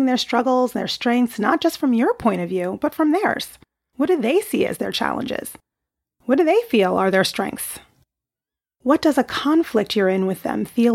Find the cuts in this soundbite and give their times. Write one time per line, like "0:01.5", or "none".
none